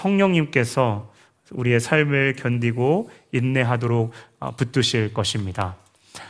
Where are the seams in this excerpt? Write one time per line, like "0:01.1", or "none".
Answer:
none